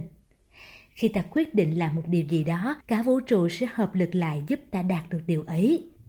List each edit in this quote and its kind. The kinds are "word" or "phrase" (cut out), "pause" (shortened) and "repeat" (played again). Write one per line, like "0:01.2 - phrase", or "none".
0:02.8 - pause